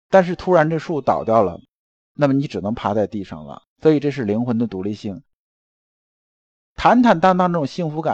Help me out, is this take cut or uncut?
cut